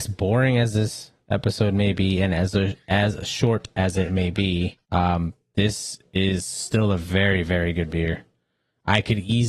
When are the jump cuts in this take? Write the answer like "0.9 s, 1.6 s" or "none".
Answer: 4.8 s

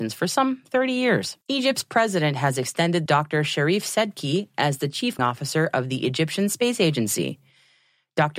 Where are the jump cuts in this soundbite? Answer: 1.4 s, 3.1 s, 5.2 s

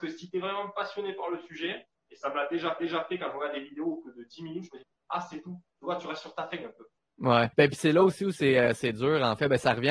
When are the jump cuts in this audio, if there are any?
2.8 s, 7.5 s

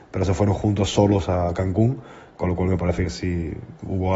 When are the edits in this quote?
none

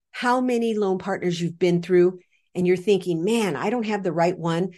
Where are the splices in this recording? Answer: none

